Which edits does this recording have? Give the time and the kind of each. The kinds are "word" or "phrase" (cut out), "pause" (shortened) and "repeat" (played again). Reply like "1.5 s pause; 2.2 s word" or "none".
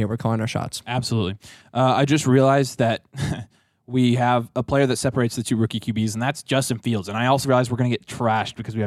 7.4 s word

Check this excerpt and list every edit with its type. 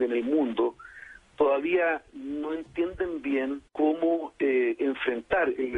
3.7 s pause

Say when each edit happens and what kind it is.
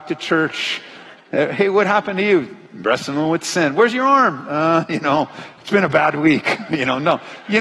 1.2 s pause

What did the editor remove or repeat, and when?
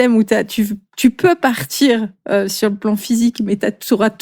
none

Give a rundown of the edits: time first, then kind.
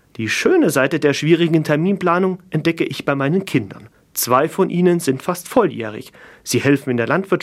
3.9 s pause

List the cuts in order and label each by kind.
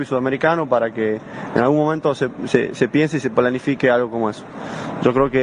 none

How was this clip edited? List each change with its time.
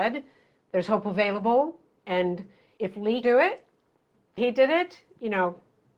2.8 s word; 3.2 s word; 4.4 s word

